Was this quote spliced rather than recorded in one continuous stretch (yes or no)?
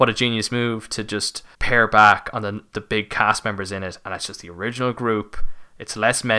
yes